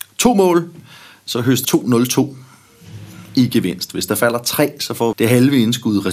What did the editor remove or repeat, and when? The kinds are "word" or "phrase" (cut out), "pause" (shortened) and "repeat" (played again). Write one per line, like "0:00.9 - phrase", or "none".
0:01.6 - phrase
0:05.1 - word